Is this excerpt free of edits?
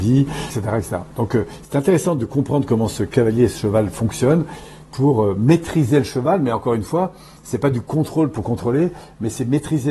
yes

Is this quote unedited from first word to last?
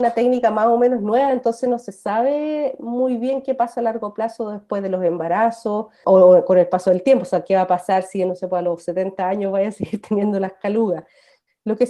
yes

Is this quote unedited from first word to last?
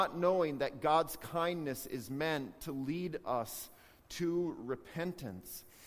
yes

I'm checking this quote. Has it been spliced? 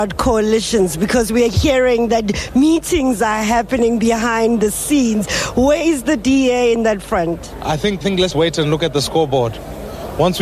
yes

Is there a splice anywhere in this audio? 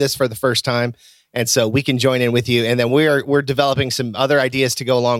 no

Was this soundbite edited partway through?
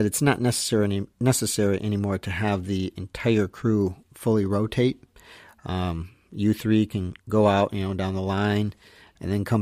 yes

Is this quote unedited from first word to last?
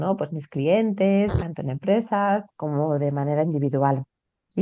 no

